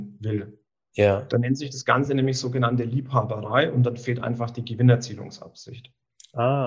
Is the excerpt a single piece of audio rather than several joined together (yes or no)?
yes